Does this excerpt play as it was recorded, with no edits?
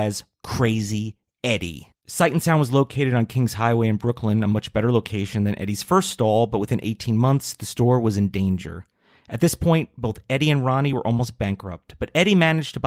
yes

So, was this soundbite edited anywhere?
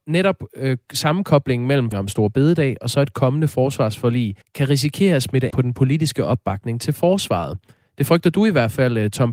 yes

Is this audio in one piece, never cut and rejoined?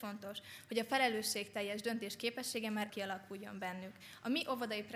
no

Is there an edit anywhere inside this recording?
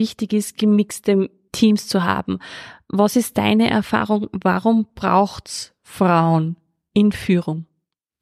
no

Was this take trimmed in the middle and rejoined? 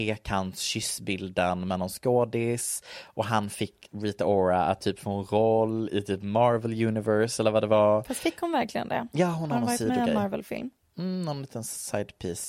no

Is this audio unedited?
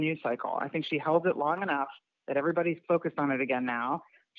yes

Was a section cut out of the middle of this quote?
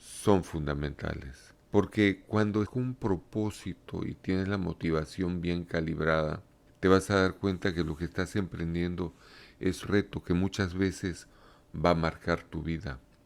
yes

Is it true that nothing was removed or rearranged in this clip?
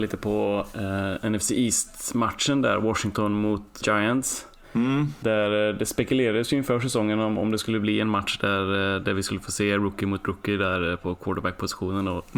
no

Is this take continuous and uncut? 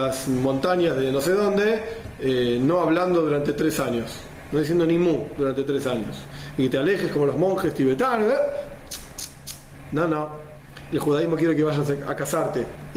yes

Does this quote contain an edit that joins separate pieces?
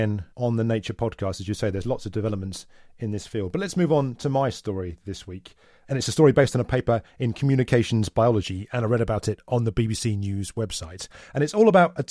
no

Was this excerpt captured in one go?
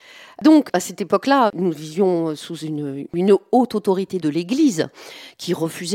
yes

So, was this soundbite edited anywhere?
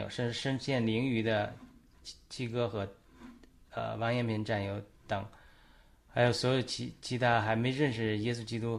no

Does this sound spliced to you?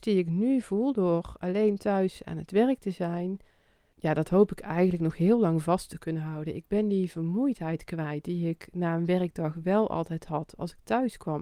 no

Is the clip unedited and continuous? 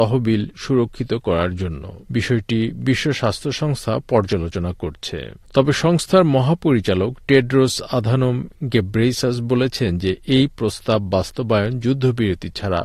no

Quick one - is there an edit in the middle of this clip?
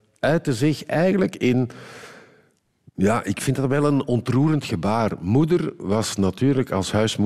no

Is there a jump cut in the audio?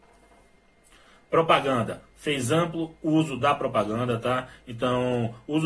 no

